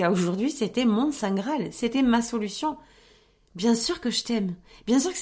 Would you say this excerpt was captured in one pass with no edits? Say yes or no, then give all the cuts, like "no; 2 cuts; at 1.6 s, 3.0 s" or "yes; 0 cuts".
yes; 0 cuts